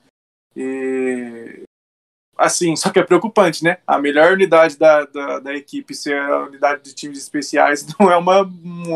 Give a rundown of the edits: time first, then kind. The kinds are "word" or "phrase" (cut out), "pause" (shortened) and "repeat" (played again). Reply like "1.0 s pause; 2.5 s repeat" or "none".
none